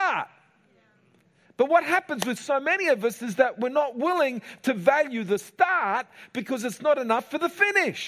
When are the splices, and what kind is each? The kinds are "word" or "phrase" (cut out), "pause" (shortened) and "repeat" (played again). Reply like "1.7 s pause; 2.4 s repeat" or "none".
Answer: none